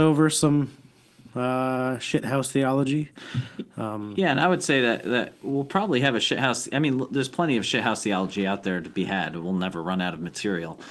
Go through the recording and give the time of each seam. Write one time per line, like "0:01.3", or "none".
none